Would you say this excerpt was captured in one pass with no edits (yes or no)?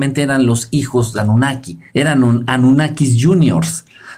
no